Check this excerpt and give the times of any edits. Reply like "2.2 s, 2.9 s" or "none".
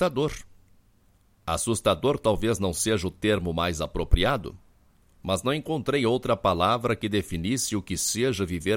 none